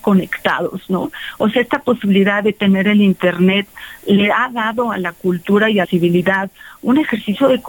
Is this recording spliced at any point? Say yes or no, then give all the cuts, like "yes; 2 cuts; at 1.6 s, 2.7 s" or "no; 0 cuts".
yes; 1 cut; at 5.8 s